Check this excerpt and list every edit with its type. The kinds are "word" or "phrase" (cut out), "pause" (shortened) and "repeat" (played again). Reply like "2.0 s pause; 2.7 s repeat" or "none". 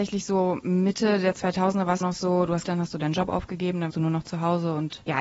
2.0 s word; 2.6 s word; 3.9 s word